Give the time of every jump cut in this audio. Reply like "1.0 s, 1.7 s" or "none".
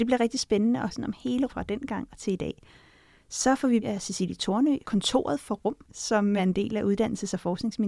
0.9 s, 1.5 s, 3.8 s, 4.8 s, 5.8 s, 6.4 s